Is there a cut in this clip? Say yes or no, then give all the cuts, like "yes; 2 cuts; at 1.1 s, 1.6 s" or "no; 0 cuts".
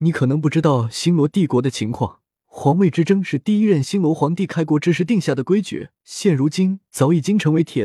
yes; 2 cuts; at 2.4 s, 6.0 s